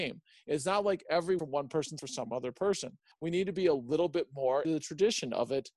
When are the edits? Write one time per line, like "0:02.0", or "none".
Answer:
0:01.4
0:02.0
0:04.6

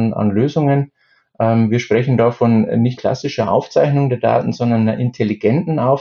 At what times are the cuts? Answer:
0:03.0

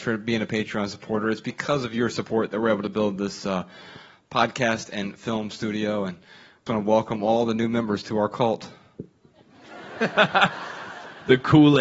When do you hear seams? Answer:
0:06.7

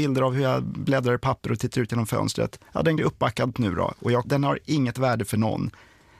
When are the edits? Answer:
0:02.7
0:03.0
0:03.5
0:04.2

